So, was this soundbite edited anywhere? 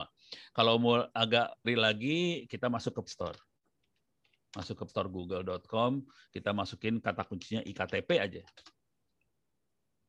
yes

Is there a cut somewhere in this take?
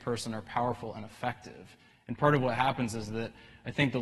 no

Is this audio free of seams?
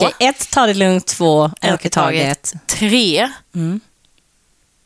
no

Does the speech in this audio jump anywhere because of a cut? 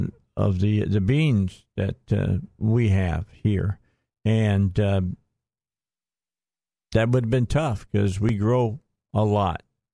no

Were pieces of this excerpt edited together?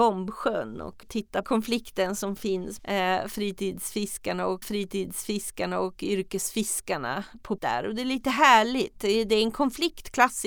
yes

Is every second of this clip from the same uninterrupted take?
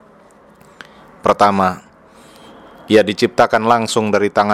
yes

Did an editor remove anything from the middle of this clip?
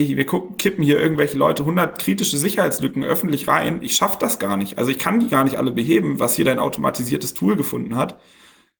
no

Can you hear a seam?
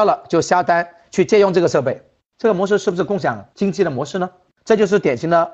no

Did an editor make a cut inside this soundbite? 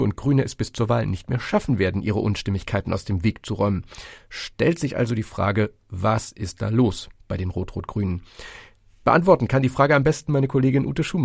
no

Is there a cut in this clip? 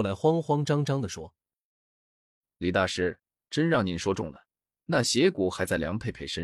no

